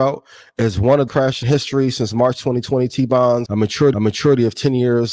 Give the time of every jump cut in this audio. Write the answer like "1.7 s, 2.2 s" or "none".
1.1 s, 1.4 s, 3.5 s, 3.9 s